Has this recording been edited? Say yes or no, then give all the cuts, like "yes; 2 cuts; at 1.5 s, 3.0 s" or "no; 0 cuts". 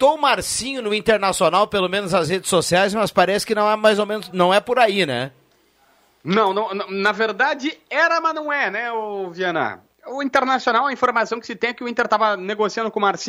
no; 0 cuts